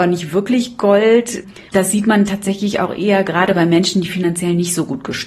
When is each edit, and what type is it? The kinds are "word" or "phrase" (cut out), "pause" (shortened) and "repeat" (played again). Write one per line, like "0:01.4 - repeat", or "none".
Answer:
0:01.7 - pause